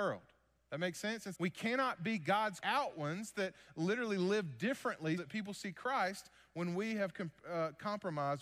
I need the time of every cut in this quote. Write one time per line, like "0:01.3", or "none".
0:01.3
0:02.6
0:03.3
0:05.2